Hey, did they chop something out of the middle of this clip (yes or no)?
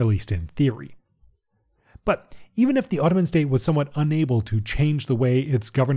no